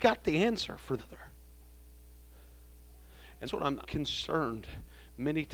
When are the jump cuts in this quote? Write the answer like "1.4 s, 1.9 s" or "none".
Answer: 1.0 s, 3.5 s, 3.8 s